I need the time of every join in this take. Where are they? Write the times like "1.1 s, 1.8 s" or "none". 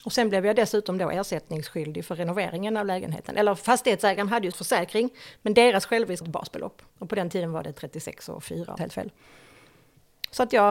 4.5 s, 6.2 s, 6.9 s, 8.8 s